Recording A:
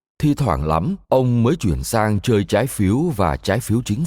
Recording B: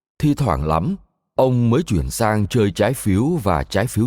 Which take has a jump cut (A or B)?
A